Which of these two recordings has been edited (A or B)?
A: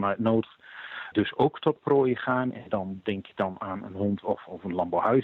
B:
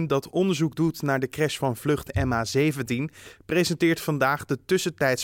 A